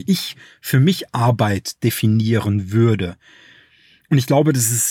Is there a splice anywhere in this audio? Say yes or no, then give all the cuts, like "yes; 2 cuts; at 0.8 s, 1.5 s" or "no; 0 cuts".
no; 0 cuts